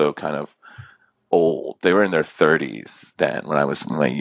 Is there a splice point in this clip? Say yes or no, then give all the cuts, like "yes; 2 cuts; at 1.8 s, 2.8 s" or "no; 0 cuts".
no; 0 cuts